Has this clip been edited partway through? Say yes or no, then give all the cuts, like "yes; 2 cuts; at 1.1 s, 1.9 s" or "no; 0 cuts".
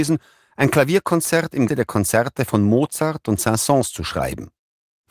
yes; 1 cut; at 1.7 s